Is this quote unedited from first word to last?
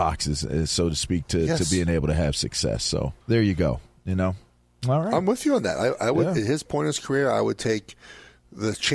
no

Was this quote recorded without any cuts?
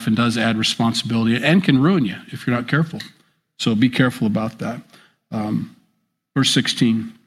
yes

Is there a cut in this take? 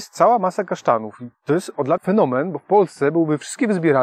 yes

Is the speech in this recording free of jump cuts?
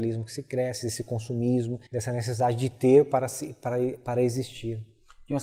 no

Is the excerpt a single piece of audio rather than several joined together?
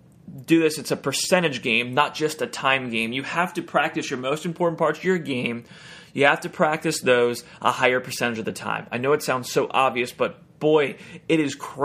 yes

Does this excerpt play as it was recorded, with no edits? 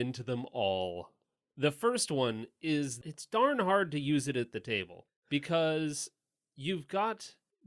yes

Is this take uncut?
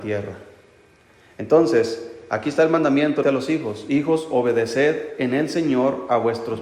no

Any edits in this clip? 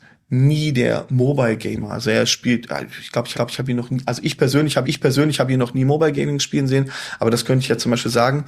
yes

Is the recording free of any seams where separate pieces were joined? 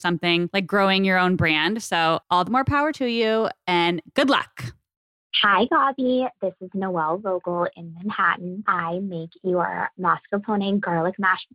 no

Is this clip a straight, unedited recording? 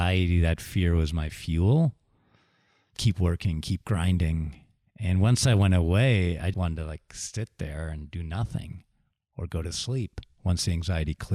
no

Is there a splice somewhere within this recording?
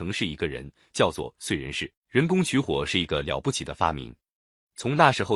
yes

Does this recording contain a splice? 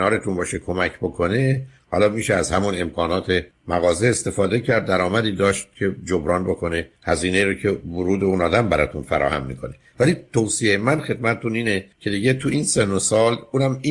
yes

